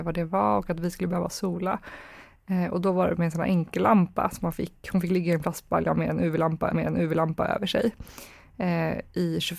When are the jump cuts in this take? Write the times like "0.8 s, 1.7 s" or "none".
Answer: 6.7 s